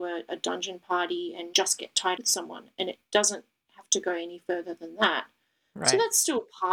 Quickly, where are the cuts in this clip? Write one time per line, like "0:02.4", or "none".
0:01.5
0:02.2